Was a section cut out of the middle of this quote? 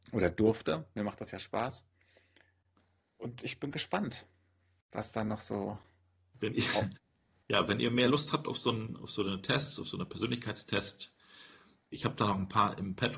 no; 0 cuts

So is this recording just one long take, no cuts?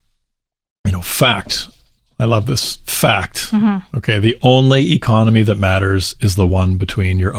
yes; 0 cuts

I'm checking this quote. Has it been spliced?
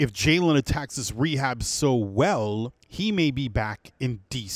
yes; 1 cut; at 2.8 s

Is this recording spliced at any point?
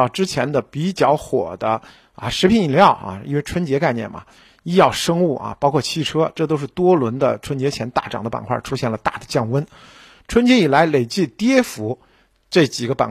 no; 0 cuts

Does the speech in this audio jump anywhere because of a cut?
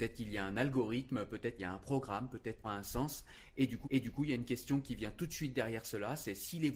yes; 3 cuts; at 1.6 s, 2.6 s, 3.8 s

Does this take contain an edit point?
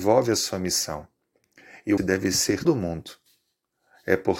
yes; 2 cuts; at 2.0 s, 2.6 s

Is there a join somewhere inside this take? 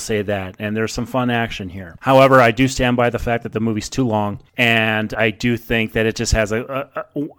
no; 0 cuts

